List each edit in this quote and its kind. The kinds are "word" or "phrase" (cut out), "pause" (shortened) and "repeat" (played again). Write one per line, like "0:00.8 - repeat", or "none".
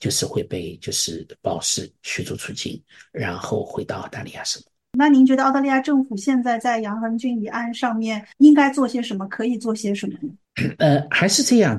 0:08.3 - pause